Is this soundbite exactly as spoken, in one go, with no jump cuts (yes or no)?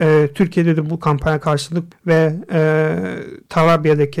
no